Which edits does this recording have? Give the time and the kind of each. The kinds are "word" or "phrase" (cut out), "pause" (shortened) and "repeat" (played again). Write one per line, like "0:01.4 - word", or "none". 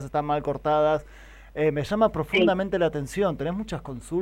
none